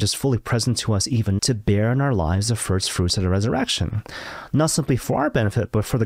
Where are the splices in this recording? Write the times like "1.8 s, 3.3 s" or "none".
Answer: 1.4 s